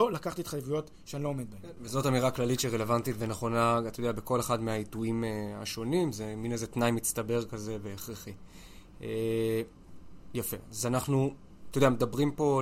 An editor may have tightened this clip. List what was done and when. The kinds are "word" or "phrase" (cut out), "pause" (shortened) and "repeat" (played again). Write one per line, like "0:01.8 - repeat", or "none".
none

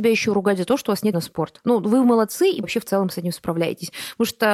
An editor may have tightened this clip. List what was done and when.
0:01.1 - word
0:02.6 - phrase

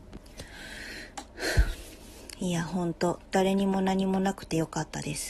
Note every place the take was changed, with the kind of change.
0:03.3 - pause

